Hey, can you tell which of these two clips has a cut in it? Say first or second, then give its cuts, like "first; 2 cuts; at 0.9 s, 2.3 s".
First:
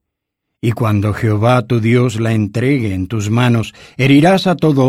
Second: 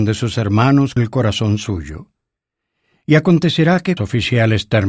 second; 2 cuts; at 1.0 s, 4.0 s